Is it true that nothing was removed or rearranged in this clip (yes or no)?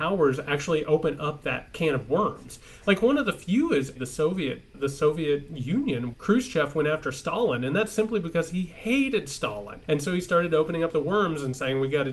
no